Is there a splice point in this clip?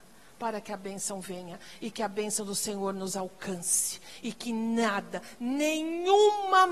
no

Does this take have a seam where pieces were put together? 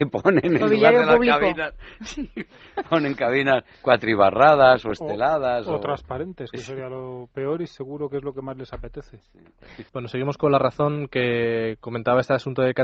yes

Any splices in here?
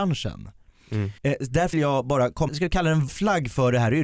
yes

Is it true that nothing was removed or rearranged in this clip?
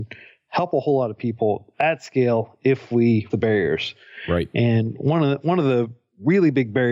no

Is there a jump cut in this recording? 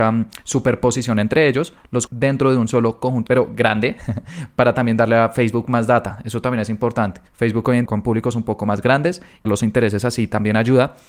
yes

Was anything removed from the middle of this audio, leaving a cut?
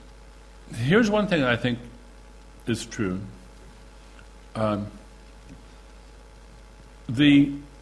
no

